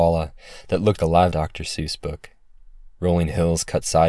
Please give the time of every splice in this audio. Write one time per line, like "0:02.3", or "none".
0:01.0
0:01.3
0:02.9

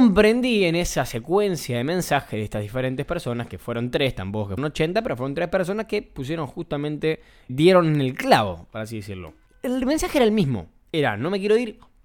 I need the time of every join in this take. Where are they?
0:04.6
0:07.5
0:09.5

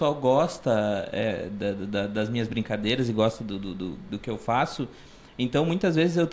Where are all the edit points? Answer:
none

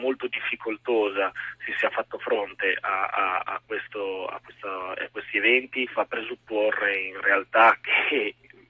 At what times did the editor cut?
0:03.4
0:05.9

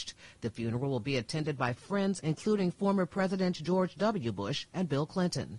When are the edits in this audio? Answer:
0:01.8
0:02.2

